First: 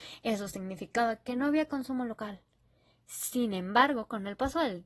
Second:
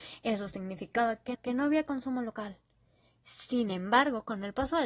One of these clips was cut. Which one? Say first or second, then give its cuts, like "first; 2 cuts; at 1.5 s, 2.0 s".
second; 1 cut; at 1.3 s